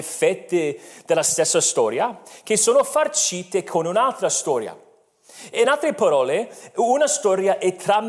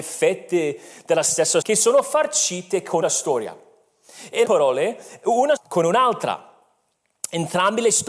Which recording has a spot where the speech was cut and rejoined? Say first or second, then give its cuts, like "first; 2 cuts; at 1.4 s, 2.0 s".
second; 4 cuts; at 1.6 s, 3.0 s, 4.4 s, 5.6 s